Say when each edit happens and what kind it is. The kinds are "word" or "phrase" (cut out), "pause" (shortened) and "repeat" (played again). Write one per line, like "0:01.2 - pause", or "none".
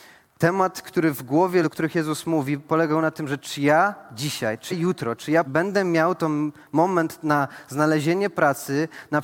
0:01.6 - word
0:04.7 - word
0:05.5 - word